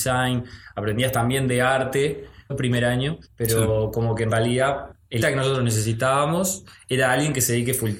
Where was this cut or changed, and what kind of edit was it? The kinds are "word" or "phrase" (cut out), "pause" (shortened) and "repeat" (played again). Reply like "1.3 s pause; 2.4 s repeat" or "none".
2.5 s phrase; 3.3 s pause; 5.2 s word